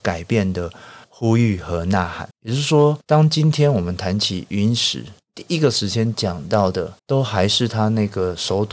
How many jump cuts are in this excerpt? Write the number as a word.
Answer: three